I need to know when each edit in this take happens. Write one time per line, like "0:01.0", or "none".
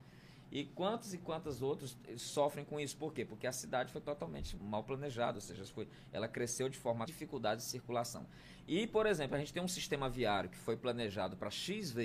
0:04.6
0:07.1